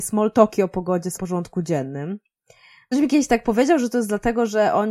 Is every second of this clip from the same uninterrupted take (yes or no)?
no